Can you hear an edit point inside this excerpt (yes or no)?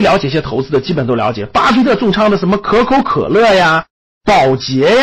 no